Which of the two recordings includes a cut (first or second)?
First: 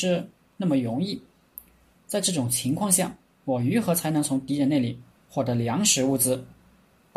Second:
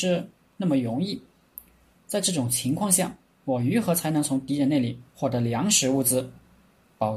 second